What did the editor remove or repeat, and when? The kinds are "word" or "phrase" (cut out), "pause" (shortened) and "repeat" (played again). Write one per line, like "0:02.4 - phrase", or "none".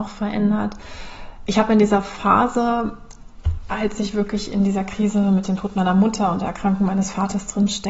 none